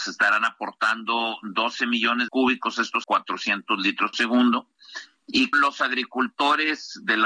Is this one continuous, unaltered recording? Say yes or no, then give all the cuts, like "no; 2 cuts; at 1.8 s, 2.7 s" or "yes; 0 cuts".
no; 4 cuts; at 2.3 s, 3.0 s, 4.1 s, 5.5 s